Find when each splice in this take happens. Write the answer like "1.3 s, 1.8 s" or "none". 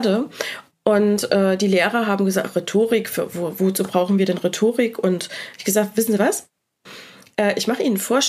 none